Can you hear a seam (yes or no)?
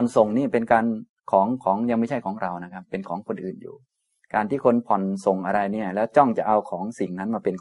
no